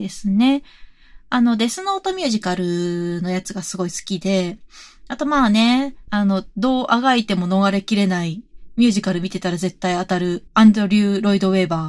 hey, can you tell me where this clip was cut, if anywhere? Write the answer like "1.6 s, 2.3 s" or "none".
10.5 s